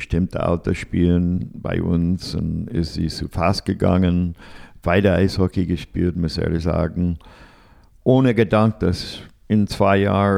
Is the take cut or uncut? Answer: uncut